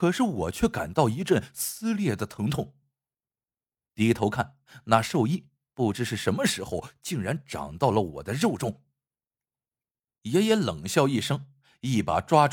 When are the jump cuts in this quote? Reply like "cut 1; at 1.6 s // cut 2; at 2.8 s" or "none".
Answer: none